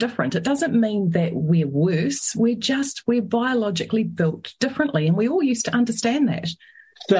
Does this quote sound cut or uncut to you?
uncut